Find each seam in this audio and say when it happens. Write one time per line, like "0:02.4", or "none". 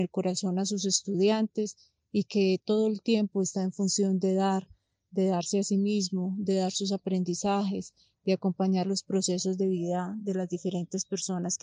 none